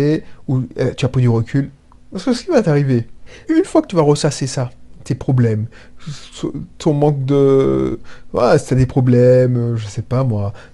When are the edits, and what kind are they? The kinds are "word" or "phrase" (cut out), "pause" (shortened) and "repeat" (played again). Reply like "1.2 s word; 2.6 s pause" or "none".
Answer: 3.4 s word